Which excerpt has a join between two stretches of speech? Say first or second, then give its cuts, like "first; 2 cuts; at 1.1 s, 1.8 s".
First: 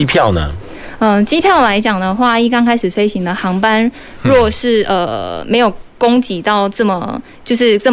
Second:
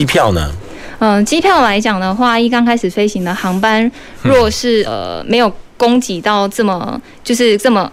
second; 1 cut; at 4.8 s